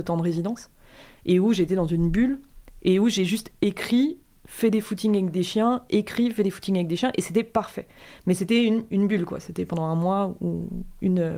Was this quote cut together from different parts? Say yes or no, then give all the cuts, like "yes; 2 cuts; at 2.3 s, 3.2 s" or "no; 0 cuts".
no; 0 cuts